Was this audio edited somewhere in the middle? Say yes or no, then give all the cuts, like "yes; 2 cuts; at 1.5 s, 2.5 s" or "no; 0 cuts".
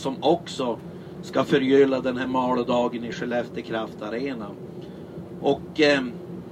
no; 0 cuts